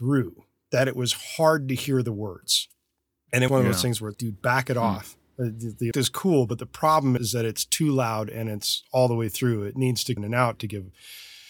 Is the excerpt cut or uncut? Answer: cut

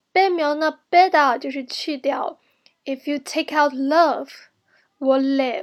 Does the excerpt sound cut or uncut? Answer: uncut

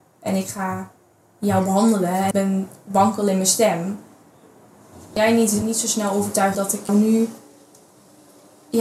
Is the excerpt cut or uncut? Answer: cut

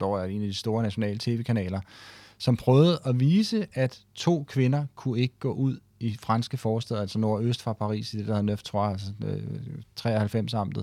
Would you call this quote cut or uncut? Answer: uncut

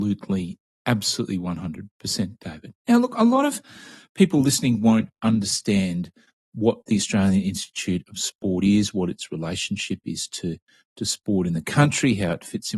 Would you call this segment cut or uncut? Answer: uncut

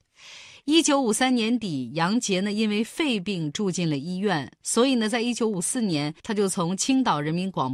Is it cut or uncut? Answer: cut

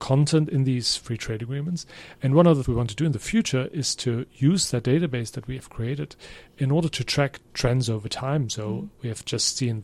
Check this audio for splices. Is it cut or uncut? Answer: cut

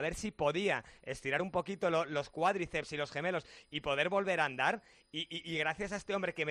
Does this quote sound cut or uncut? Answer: uncut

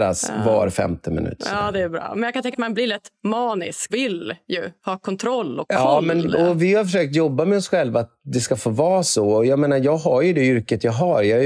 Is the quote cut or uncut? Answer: cut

